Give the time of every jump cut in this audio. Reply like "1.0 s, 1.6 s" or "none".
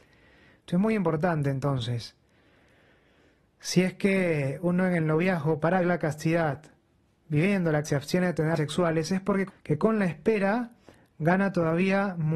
5.8 s, 7.8 s, 8.6 s, 9.5 s